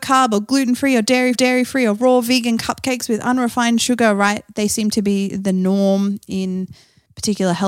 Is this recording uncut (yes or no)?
no